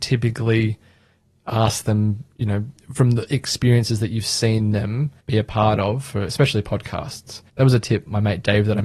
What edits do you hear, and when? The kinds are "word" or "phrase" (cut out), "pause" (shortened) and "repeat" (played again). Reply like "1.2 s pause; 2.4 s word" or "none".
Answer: 2.8 s pause; 5.2 s pause; 7.5 s pause